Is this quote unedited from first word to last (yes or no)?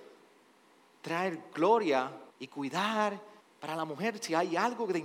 no